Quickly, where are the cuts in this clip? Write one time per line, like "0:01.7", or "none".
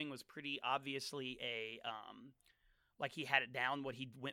none